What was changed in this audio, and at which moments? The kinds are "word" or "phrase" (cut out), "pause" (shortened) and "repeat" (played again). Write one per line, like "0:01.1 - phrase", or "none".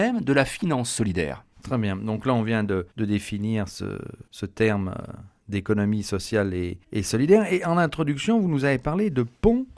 0:01.5 - pause
0:02.9 - pause
0:04.3 - pause
0:06.8 - pause